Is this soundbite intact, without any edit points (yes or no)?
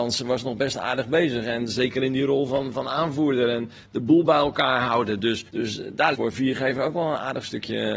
no